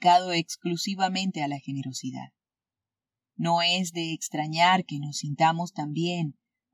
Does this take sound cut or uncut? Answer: uncut